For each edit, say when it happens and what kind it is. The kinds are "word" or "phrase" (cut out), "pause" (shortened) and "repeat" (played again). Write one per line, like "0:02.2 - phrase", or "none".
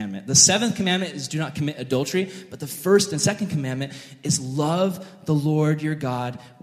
none